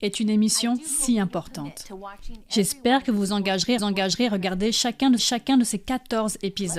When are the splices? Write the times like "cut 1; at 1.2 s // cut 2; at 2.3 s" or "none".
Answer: cut 1; at 3.8 s // cut 2; at 5.2 s